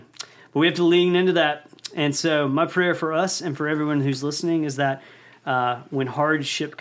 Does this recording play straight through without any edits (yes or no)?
yes